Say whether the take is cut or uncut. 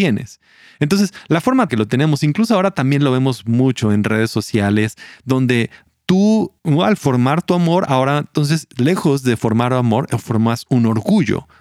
cut